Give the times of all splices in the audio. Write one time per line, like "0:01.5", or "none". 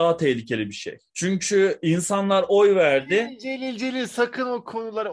0:01.1